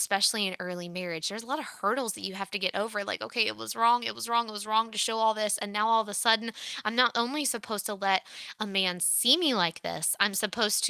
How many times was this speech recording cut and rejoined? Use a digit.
0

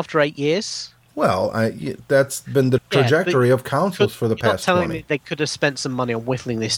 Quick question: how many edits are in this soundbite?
1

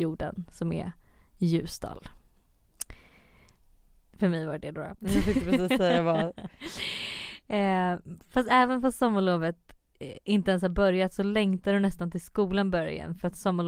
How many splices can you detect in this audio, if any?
0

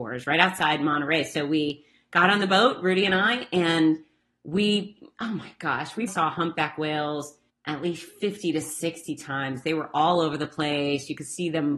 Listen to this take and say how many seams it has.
2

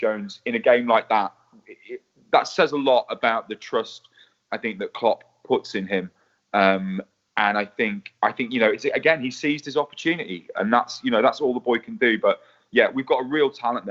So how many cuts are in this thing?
0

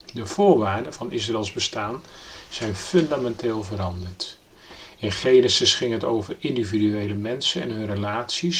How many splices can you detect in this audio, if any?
0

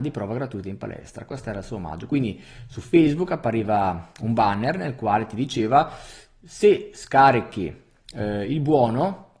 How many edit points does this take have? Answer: 0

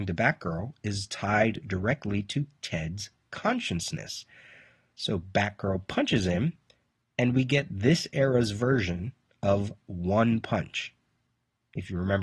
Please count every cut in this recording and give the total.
0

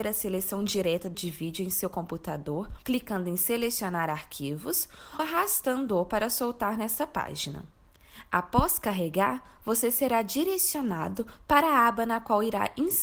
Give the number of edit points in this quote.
3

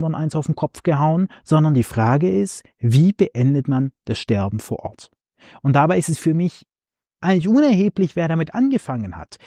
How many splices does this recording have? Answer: 0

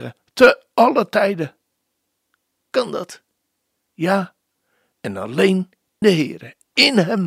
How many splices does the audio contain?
2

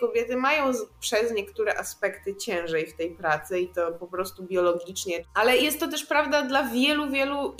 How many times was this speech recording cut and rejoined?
0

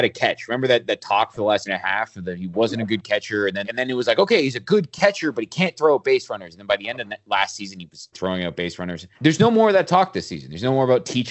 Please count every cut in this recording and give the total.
4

